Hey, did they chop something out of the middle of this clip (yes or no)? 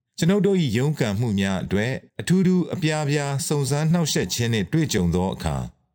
yes